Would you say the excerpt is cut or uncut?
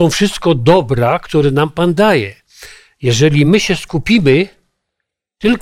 uncut